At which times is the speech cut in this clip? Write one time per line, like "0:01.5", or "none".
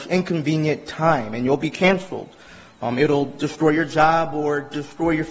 none